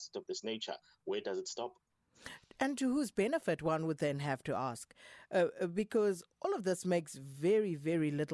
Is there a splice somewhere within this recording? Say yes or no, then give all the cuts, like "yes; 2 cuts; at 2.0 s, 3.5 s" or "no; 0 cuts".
no; 0 cuts